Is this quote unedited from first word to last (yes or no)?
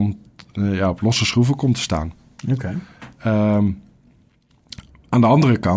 yes